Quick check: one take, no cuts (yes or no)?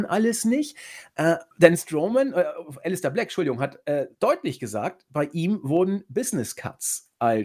no